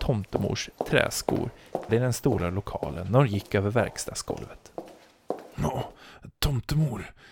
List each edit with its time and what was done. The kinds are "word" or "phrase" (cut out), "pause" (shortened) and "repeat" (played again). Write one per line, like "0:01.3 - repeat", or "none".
0:01.9 - word